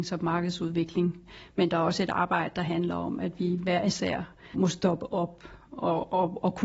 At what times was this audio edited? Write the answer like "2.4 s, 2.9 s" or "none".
4.5 s